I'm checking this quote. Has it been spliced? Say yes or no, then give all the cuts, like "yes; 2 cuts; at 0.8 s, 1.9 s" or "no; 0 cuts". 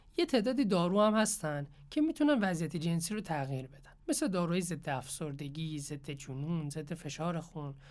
yes; 1 cut; at 4.0 s